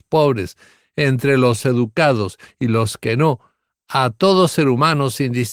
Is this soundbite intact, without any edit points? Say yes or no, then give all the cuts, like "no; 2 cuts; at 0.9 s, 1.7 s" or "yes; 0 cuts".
yes; 0 cuts